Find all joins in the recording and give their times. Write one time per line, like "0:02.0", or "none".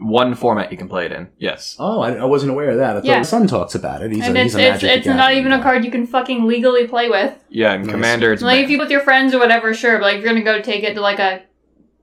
0:01.3
0:03.2
0:08.8